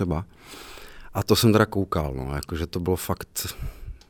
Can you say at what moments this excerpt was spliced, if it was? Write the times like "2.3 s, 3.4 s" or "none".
none